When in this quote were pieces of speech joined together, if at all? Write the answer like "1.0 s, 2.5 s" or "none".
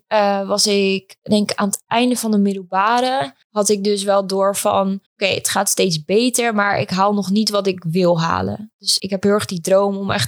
3.4 s, 5.1 s, 9.0 s